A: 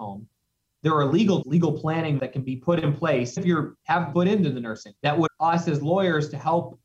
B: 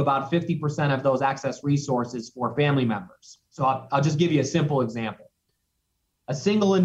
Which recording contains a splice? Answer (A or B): A